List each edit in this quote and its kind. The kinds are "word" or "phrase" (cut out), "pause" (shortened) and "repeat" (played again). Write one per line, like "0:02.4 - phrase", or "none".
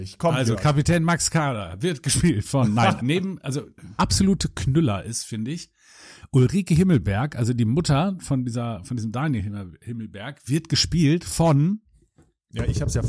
0:03.0 - word
0:04.0 - phrase